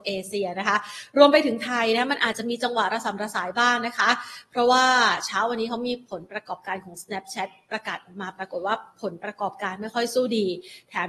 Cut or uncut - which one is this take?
uncut